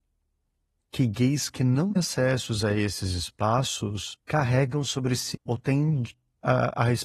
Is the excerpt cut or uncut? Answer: cut